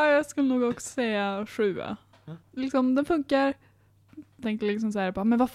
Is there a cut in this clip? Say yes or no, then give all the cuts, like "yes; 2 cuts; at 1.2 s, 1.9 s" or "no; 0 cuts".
yes; 2 cuts; at 2.4 s, 4.4 s